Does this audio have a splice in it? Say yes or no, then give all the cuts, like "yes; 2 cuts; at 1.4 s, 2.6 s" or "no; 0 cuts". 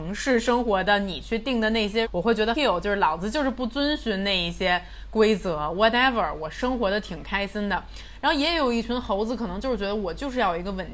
yes; 2 cuts; at 2.0 s, 2.5 s